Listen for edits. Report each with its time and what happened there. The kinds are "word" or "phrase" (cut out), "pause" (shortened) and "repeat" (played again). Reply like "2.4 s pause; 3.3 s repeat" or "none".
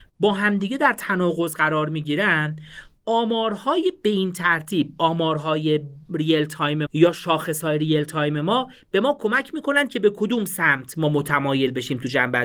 6.9 s word